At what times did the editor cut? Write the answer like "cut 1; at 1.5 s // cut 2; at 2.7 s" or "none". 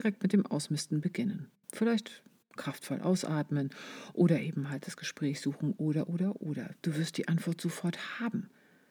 none